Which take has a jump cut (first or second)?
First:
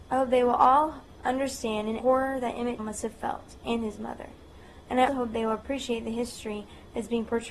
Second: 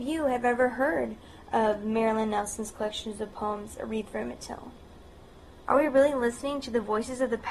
first